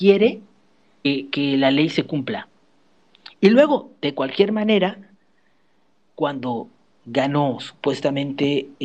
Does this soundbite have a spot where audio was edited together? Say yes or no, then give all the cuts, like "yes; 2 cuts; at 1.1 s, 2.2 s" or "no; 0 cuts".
no; 0 cuts